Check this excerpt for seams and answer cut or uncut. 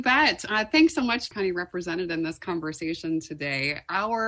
cut